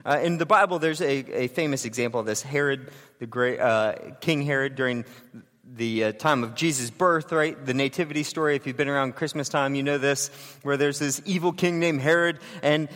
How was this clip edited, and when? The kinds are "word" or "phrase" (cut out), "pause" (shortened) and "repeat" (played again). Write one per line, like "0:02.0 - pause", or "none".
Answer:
none